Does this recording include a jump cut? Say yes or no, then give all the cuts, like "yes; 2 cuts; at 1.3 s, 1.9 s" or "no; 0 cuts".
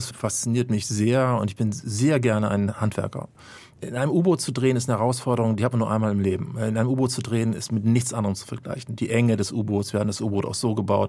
no; 0 cuts